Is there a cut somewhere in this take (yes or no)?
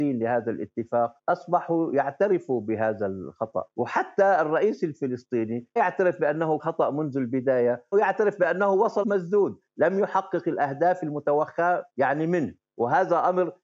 yes